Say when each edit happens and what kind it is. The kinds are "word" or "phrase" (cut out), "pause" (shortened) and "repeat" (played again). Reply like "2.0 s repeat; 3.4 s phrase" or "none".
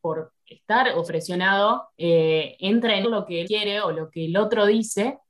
1.1 s word; 1.9 s pause; 3.0 s phrase; 3.4 s word